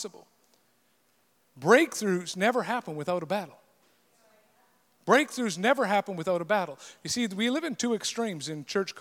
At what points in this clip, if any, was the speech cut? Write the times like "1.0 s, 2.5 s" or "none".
none